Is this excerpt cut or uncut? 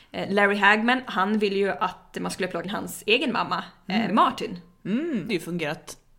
cut